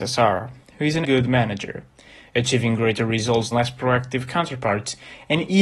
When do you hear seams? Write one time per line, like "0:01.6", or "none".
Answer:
0:01.0
0:03.5